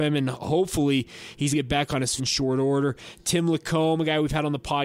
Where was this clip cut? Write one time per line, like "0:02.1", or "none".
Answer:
0:01.5
0:02.2